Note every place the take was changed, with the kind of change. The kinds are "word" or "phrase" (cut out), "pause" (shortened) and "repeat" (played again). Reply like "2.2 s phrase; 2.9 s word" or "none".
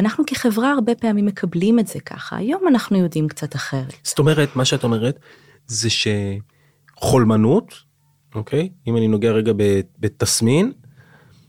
none